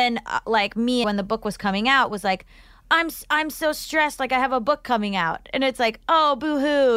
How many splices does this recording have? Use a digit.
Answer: 1